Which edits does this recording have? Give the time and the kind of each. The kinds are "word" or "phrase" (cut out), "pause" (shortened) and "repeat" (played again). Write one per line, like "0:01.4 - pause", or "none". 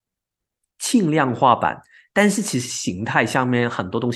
none